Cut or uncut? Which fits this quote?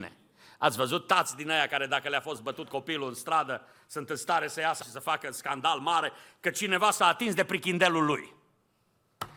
cut